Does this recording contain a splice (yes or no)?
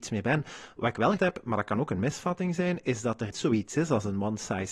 yes